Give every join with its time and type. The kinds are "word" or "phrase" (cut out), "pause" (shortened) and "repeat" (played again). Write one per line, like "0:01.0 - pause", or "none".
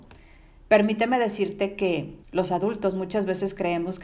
0:02.2 - pause